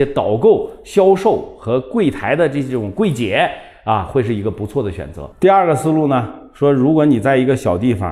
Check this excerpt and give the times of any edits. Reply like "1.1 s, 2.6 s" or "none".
5.3 s